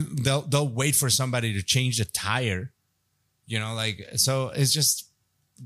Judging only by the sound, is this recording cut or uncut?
uncut